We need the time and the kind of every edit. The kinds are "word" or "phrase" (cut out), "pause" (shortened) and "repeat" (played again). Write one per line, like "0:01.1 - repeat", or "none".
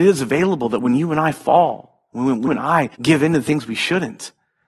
0:02.5 - word
0:02.9 - pause